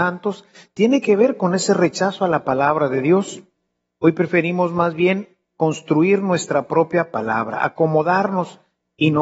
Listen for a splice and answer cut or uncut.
uncut